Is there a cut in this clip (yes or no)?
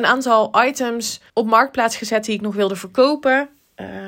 yes